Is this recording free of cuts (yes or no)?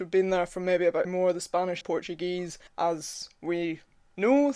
no